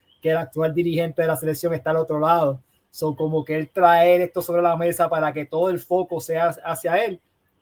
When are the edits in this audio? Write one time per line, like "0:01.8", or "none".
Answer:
none